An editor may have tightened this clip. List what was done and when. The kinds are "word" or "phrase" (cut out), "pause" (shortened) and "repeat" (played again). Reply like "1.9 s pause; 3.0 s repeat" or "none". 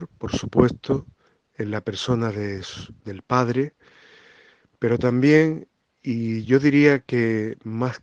none